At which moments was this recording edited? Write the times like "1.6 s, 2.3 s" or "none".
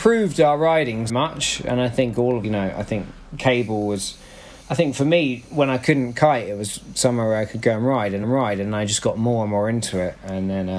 1.1 s, 2.4 s, 4.6 s, 8.2 s